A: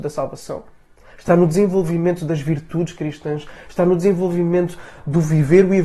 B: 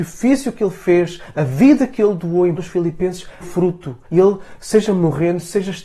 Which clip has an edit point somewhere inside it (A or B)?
B